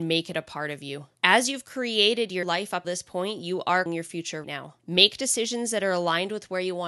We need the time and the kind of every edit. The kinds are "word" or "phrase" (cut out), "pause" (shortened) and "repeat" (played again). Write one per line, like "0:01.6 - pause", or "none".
0:01.1 - pause
0:02.4 - word
0:02.8 - word
0:03.9 - word
0:04.4 - word
0:04.8 - pause